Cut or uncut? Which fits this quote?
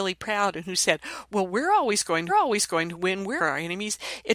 cut